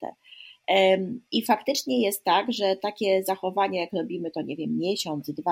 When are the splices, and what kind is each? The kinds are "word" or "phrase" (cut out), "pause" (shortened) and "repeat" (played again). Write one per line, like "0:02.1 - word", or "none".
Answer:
none